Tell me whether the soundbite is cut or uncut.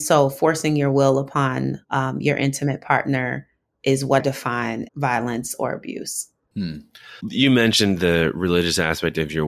cut